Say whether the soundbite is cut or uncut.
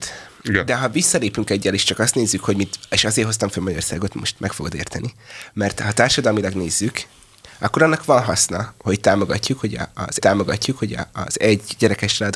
cut